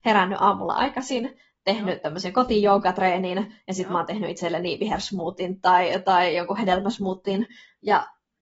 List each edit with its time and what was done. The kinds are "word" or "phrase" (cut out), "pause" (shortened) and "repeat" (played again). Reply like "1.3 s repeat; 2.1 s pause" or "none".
none